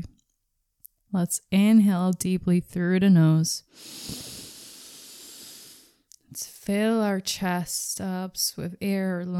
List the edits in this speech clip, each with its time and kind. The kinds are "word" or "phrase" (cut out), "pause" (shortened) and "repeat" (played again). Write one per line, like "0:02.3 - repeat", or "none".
none